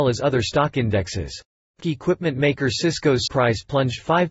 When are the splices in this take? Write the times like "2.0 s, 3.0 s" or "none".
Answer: 1.8 s, 3.3 s